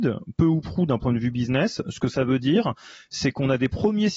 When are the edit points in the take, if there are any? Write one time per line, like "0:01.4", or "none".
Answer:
none